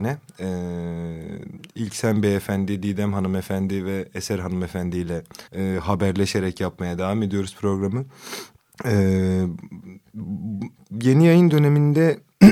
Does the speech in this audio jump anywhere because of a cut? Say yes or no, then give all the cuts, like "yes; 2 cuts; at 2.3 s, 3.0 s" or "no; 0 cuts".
yes; 2 cuts; at 5.5 s, 8.6 s